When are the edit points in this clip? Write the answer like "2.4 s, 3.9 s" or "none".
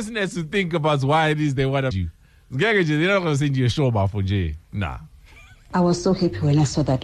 1.9 s, 4.6 s